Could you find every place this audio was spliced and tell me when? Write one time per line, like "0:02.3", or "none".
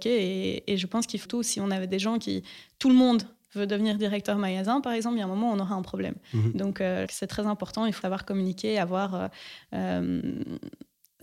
0:01.3
0:07.1
0:08.0